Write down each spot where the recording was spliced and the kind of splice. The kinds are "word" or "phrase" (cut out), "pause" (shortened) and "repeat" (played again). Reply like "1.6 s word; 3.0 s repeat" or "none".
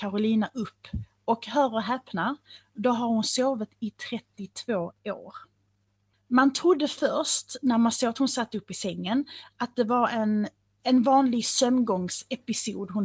none